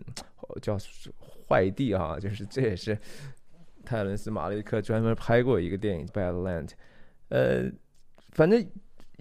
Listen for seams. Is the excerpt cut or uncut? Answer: cut